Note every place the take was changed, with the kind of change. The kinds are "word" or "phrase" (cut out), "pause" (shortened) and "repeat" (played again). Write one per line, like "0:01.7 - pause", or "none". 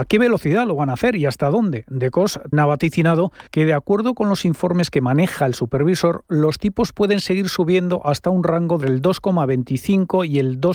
0:02.5 - word
0:03.5 - pause
0:08.8 - word